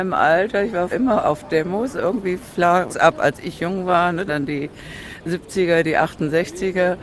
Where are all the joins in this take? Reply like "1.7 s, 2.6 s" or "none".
0.9 s, 2.9 s, 4.3 s